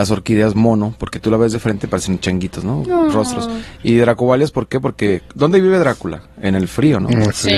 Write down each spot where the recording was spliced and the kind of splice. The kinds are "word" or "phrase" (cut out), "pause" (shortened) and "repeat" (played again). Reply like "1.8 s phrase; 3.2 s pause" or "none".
5.3 s pause